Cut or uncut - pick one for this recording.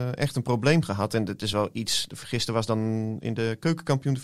uncut